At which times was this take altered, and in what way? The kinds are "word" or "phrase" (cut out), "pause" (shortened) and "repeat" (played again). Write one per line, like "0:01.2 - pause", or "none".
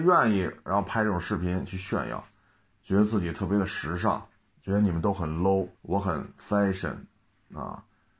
0:04.5 - pause
0:05.7 - pause